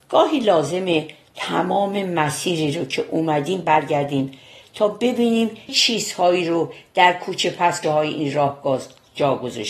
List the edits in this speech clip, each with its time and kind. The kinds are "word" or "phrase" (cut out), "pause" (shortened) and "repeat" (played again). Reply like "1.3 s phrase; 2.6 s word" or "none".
5.7 s word; 7.8 s word